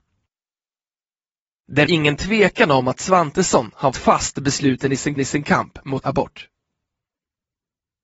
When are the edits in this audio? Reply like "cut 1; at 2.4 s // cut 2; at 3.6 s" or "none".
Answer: cut 1; at 1.8 s // cut 2; at 3.9 s // cut 3; at 5.2 s // cut 4; at 6.0 s